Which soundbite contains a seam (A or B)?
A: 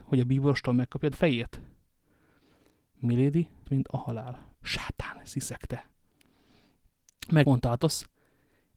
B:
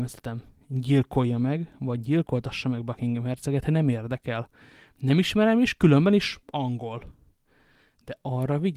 A